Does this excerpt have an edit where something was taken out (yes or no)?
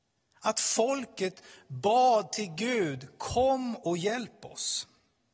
no